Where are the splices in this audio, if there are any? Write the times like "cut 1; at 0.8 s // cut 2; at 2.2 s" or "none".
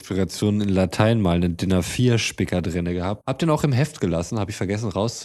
cut 1; at 3.2 s